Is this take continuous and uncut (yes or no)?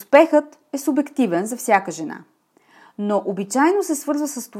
yes